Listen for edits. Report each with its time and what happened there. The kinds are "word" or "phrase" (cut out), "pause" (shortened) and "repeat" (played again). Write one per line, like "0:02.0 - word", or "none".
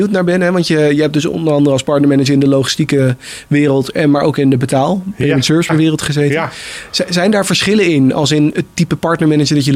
0:05.7 - word
0:08.5 - word

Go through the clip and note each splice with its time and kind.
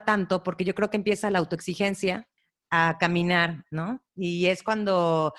none

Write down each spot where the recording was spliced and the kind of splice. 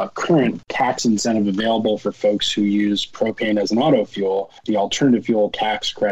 0:04.6 - pause

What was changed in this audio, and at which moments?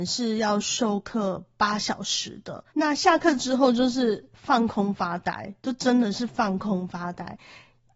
0:02.7 - pause

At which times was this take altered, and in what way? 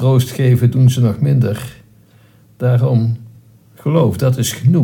none

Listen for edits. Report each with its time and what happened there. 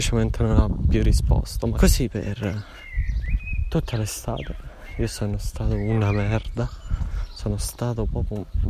0:01.7 - phrase

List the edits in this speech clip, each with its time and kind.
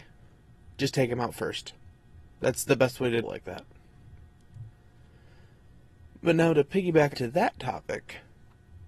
0:02.3 - pause
0:03.2 - phrase
0:06.1 - pause
0:07.1 - word

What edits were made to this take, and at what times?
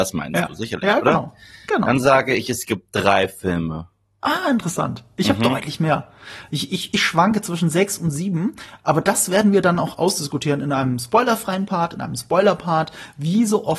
none

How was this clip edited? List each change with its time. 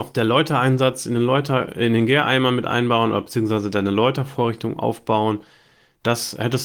none

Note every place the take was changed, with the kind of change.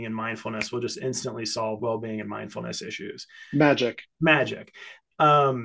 0:01.8 - word
0:04.1 - pause

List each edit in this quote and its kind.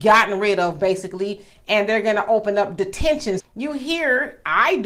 0:03.4 - word

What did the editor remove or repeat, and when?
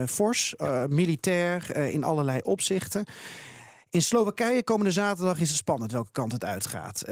none

